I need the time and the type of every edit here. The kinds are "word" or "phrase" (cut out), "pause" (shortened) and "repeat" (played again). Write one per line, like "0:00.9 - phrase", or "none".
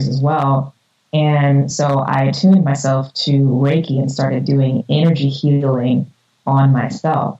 none